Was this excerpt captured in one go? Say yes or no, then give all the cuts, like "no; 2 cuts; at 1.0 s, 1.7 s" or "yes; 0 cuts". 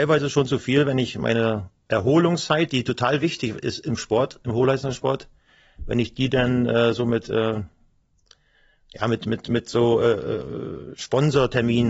yes; 0 cuts